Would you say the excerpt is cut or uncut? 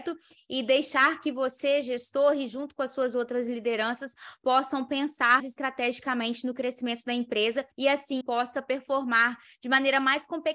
cut